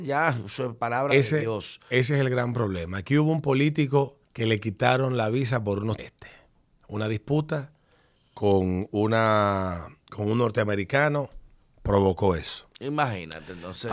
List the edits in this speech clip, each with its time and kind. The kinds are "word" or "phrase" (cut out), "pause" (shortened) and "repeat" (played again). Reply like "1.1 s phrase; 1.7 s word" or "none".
4.2 s pause; 6.0 s phrase